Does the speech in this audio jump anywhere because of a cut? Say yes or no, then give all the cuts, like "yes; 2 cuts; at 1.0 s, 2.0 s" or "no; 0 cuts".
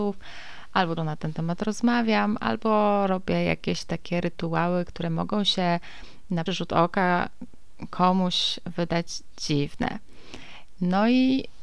yes; 2 cuts; at 1.0 s, 6.5 s